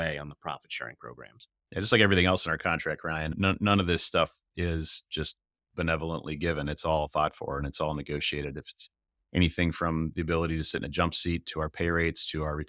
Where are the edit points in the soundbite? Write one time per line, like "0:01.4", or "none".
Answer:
none